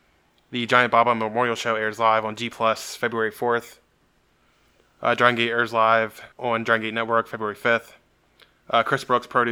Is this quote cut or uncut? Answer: cut